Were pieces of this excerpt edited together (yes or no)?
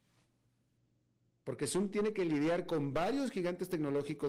no